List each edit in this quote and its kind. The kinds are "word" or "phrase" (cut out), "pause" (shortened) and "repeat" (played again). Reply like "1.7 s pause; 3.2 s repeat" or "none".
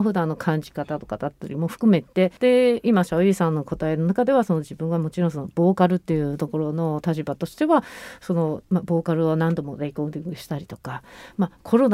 2.4 s pause